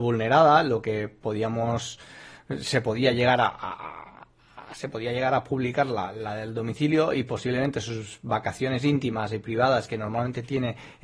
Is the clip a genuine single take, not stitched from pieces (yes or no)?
yes